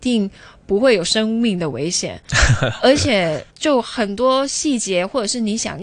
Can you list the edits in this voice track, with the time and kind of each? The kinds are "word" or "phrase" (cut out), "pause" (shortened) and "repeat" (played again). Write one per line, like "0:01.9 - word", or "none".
0:03.5 - pause